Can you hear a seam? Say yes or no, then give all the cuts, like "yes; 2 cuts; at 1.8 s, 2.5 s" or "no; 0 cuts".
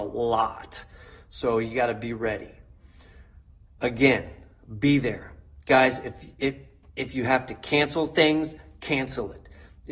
no; 0 cuts